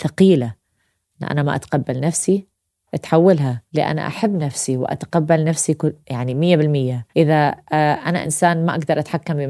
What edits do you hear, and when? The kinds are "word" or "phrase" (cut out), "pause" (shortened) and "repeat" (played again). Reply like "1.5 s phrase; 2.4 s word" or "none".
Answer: 3.7 s pause; 6.0 s pause; 7.1 s pause